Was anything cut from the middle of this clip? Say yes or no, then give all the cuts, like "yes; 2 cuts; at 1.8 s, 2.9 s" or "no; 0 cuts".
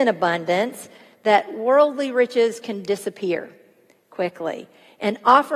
no; 0 cuts